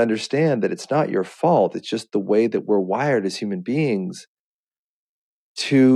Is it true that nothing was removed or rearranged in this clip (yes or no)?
yes